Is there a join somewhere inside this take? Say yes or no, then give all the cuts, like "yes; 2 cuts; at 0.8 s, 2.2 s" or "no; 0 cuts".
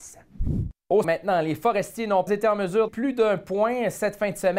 yes; 3 cuts; at 1.0 s, 2.3 s, 2.9 s